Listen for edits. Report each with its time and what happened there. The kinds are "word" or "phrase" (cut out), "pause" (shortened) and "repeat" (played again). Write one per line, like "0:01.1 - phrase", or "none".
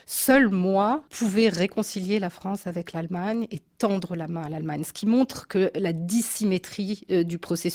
0:01.1 - pause